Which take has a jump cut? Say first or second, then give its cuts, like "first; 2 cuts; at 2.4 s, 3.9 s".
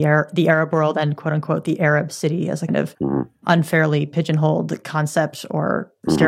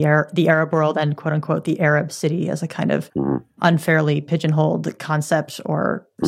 first; 1 cut; at 2.7 s